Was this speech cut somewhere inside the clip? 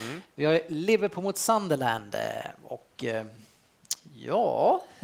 no; 0 cuts

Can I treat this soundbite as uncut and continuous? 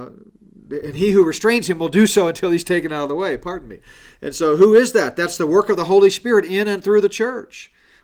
yes; 0 cuts

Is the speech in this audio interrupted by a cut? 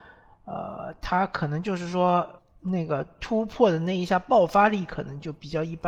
yes; 1 cut; at 2.4 s

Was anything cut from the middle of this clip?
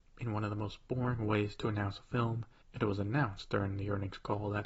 no; 0 cuts

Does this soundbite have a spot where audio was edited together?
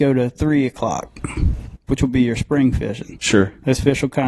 no; 0 cuts

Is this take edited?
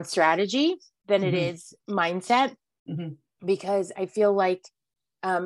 no; 0 cuts

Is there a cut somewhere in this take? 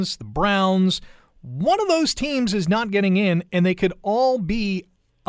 no; 0 cuts

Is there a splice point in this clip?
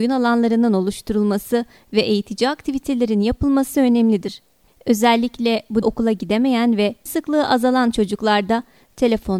yes; 3 cuts; at 4.7 s, 5.8 s, 7.1 s

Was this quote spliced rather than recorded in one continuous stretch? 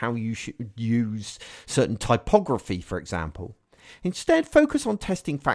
no; 0 cuts

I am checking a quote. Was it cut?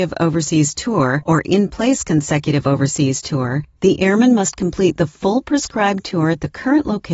no; 0 cuts

